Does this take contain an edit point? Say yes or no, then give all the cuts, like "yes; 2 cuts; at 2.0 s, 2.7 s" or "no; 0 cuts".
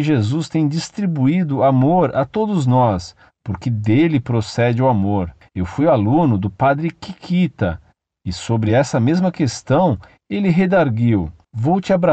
no; 0 cuts